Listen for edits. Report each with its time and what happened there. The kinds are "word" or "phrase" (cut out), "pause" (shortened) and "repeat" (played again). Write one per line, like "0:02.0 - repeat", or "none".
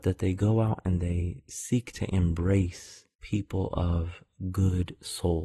0:03.1 - pause